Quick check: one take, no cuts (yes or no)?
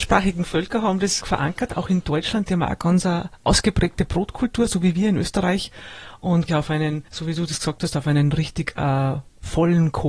no